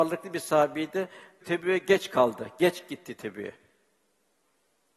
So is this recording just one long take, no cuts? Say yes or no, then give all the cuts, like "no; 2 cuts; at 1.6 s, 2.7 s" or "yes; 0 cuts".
yes; 0 cuts